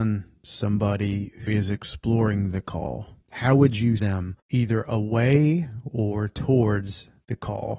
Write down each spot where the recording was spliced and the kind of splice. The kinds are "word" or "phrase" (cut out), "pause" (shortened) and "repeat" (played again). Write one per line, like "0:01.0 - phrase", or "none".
0:01.5 - word
0:03.2 - pause
0:04.0 - word
0:04.4 - pause